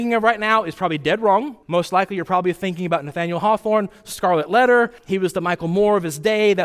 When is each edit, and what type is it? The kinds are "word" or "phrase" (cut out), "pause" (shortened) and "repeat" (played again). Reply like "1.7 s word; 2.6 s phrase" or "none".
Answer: 1.6 s pause; 5.0 s pause